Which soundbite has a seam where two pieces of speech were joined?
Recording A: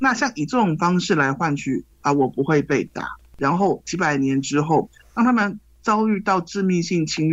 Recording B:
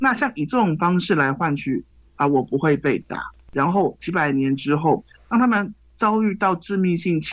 A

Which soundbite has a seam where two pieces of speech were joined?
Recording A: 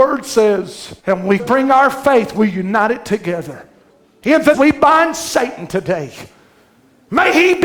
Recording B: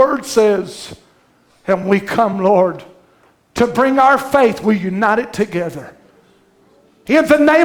A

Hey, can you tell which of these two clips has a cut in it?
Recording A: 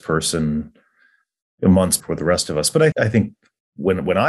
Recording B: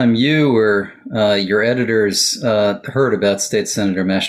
A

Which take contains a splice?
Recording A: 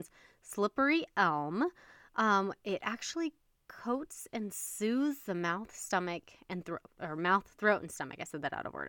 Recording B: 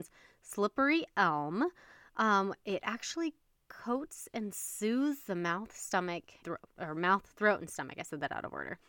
B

